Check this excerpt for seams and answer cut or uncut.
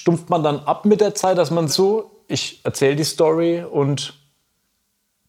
cut